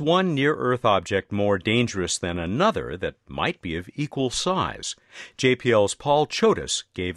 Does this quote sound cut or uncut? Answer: uncut